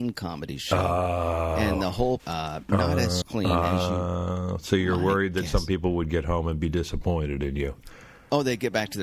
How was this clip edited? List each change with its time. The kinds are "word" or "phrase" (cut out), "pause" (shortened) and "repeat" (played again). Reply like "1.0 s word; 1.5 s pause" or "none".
1.7 s word; 2.2 s word; 3.2 s word